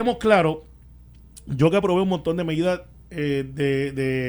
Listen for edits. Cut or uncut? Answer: uncut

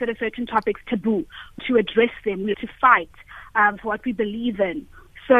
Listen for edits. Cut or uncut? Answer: cut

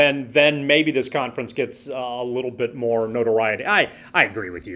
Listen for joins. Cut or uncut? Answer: uncut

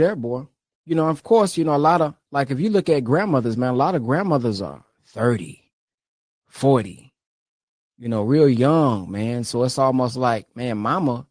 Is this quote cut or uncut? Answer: uncut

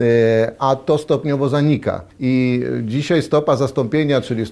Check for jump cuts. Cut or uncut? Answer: cut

